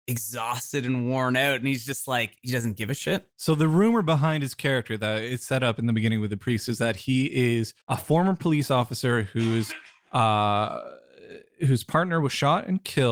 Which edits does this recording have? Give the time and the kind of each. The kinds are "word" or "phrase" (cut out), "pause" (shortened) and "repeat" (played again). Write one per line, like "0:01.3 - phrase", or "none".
0:03.3 - pause
0:07.8 - pause